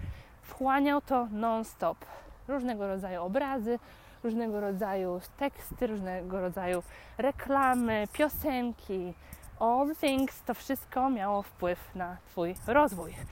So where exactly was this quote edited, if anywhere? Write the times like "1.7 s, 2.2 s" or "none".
none